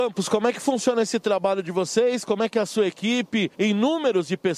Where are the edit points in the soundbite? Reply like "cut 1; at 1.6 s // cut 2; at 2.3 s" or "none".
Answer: none